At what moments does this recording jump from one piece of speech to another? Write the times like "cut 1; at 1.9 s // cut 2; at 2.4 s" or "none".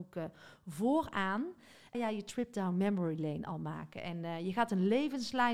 cut 1; at 1.9 s